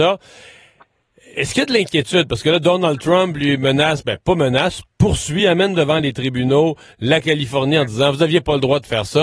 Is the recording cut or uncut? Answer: uncut